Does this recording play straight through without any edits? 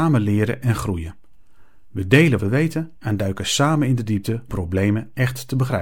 no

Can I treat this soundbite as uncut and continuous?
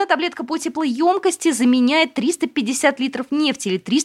yes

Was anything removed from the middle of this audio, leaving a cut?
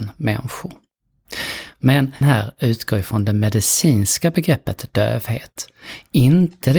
yes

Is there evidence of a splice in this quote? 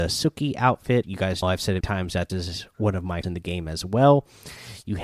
yes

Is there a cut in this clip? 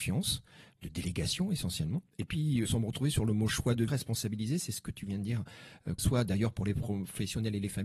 yes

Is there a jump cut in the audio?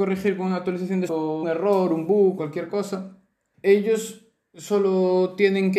yes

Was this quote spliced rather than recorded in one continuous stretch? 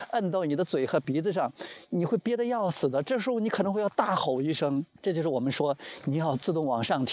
yes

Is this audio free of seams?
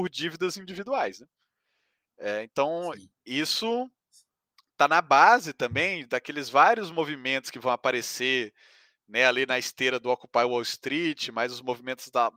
no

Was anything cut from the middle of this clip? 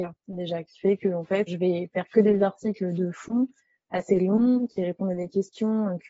yes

